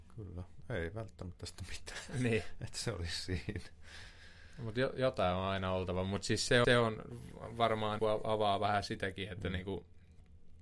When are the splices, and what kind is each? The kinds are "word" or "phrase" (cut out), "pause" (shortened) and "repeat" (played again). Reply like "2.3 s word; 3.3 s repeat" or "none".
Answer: 6.6 s repeat; 8.0 s word